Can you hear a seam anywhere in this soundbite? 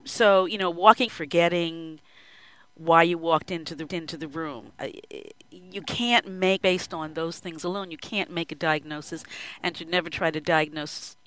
yes; 3 cuts; at 1.1 s, 3.9 s, 6.6 s

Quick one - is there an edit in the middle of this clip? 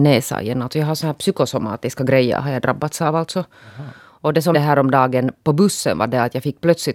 yes; 1 cut; at 4.5 s

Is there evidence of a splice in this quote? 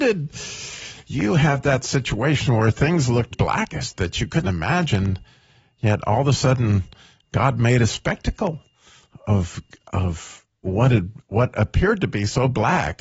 yes; 2 cuts; at 3.3 s, 4.4 s

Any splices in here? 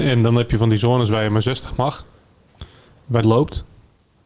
yes; 1 cut; at 3.2 s

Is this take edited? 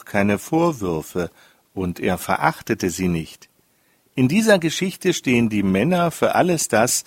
no; 0 cuts

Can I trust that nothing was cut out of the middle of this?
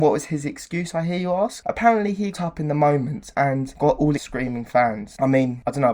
no; 2 cuts; at 2.3 s, 4.2 s

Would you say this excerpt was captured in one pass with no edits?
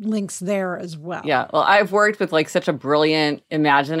yes; 0 cuts

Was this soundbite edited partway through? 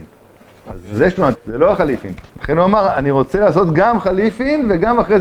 yes; 2 cuts; at 1.3 s, 2.3 s

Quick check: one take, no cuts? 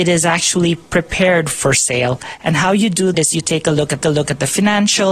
no; 2 cuts; at 3.1 s, 4.0 s

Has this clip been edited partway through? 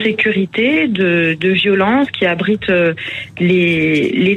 no; 0 cuts

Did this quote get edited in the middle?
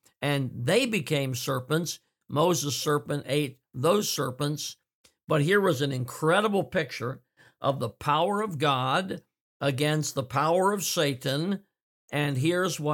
no; 0 cuts

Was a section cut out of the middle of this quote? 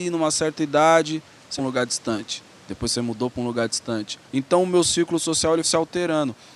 yes; 3 cuts; at 1.6 s, 4.2 s, 5.6 s

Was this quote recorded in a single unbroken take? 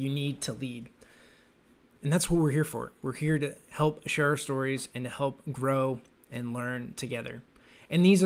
yes; 0 cuts

